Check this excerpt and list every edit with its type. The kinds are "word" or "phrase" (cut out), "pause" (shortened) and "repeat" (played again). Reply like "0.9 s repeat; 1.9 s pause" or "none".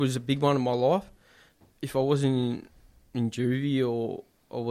none